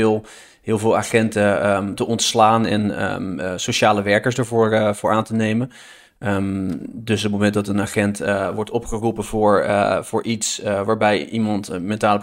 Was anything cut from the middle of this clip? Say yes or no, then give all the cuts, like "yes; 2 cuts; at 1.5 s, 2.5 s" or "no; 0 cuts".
no; 0 cuts